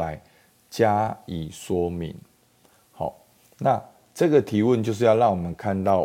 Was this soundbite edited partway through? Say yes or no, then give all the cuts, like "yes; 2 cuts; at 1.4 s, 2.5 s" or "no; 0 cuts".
no; 0 cuts